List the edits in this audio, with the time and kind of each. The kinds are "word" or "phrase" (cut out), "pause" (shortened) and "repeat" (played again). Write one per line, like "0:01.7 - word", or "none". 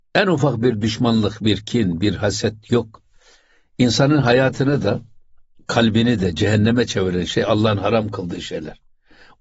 none